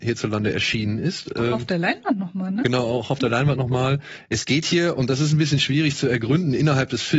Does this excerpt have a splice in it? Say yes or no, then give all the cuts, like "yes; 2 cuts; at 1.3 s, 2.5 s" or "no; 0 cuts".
no; 0 cuts